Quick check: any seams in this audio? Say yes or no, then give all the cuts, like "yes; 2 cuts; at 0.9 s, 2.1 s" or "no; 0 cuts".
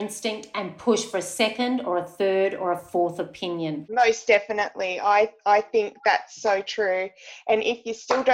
no; 0 cuts